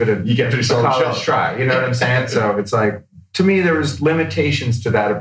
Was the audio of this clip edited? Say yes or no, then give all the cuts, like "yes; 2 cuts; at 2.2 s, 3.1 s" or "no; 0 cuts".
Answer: no; 0 cuts